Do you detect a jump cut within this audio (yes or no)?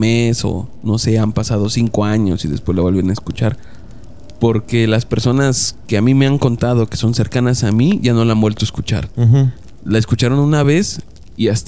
no